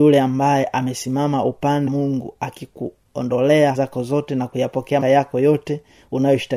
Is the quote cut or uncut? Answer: cut